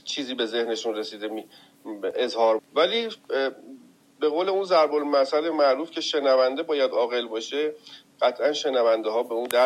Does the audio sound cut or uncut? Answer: cut